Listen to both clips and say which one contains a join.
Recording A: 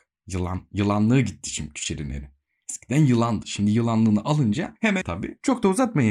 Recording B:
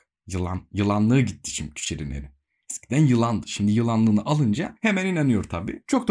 A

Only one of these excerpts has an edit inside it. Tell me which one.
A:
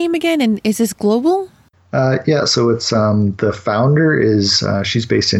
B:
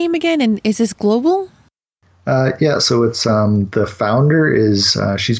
A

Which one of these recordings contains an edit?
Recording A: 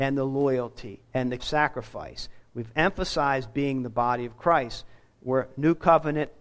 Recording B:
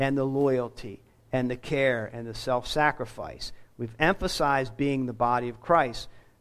A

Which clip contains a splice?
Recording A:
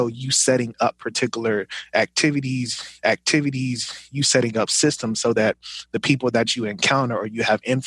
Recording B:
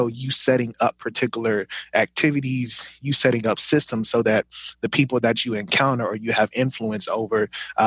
A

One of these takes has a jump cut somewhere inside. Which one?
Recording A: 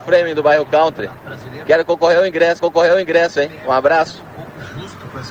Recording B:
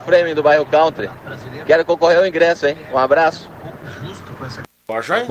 A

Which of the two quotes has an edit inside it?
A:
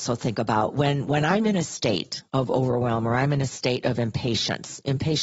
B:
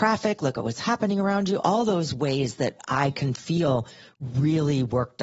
A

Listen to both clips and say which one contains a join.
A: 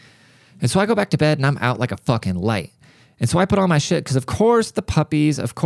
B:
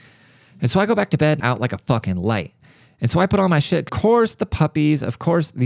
B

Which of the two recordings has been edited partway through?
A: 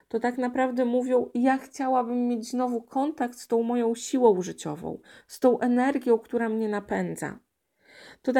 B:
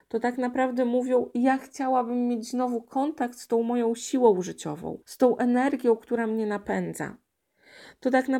B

